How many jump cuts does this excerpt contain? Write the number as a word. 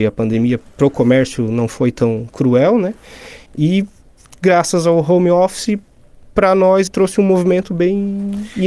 two